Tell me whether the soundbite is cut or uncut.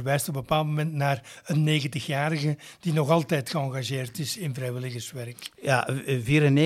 uncut